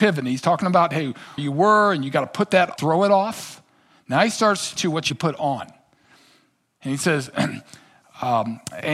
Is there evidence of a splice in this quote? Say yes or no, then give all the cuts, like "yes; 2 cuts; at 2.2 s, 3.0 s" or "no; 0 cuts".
yes; 4 cuts; at 1.4 s, 2.8 s, 4.8 s, 5.1 s